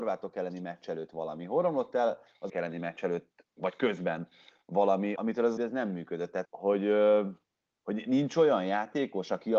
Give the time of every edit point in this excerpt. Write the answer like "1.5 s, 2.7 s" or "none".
2.5 s, 5.2 s, 5.6 s, 6.4 s

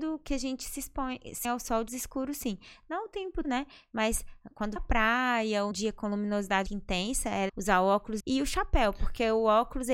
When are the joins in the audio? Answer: 1.4 s, 1.9 s, 3.4 s, 4.8 s, 5.7 s, 6.7 s, 7.5 s, 8.2 s

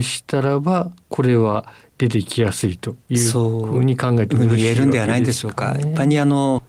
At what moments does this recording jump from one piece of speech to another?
none

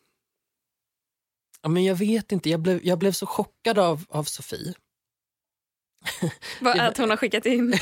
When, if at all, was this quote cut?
none

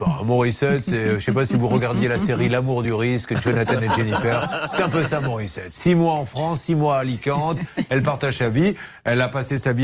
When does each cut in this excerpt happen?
none

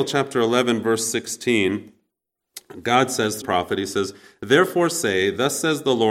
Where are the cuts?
3.4 s

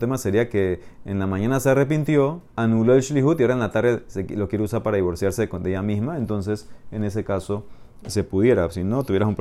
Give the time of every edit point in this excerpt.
2.5 s

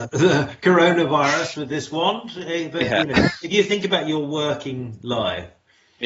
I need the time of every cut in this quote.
none

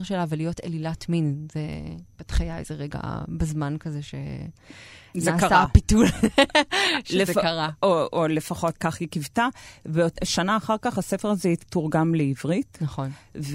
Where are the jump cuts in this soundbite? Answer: 8.8 s

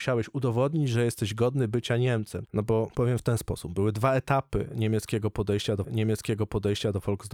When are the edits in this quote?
5.8 s

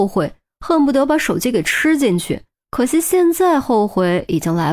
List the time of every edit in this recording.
2.5 s

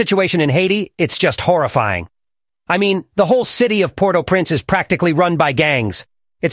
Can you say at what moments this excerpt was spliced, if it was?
none

